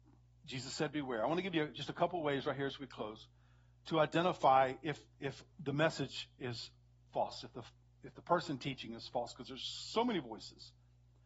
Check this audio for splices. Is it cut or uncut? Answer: cut